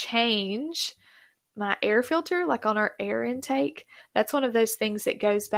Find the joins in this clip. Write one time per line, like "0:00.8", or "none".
none